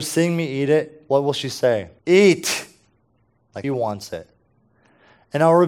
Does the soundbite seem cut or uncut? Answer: cut